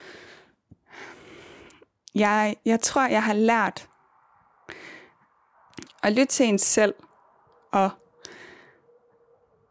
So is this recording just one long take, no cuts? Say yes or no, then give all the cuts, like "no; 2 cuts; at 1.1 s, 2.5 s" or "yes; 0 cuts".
yes; 0 cuts